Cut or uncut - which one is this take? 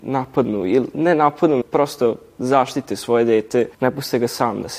cut